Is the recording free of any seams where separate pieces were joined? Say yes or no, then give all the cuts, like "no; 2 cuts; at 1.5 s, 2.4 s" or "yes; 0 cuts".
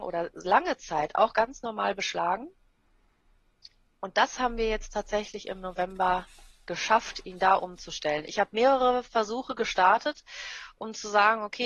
yes; 0 cuts